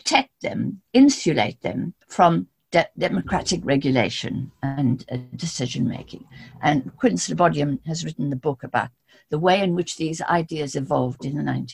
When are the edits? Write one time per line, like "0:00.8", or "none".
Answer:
0:02.0